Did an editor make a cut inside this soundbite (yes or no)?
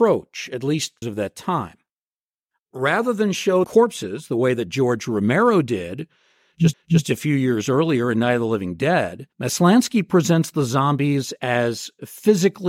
yes